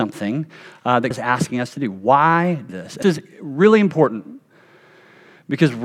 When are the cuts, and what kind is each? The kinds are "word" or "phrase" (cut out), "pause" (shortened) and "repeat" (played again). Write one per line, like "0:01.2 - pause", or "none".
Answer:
0:01.1 - word
0:02.7 - word
0:03.0 - word